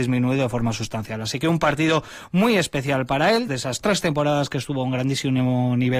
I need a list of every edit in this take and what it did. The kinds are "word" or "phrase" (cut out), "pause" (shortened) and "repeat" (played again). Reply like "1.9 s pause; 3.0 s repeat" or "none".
3.5 s word